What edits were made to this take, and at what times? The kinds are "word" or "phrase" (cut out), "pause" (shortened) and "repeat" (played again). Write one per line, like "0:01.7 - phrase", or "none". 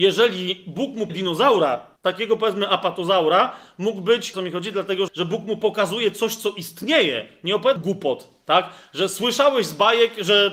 0:01.1 - word
0:02.0 - pause
0:04.3 - phrase
0:05.1 - word
0:07.8 - word